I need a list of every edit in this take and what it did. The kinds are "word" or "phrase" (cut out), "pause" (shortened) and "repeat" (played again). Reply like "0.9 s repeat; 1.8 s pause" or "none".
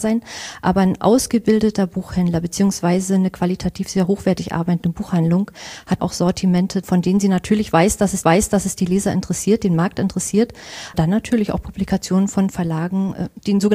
6.0 s word; 6.8 s word; 8.2 s repeat; 10.9 s word